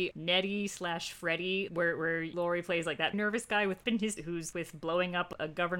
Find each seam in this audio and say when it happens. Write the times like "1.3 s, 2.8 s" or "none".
1.7 s, 2.3 s, 3.1 s, 3.8 s, 4.2 s, 4.5 s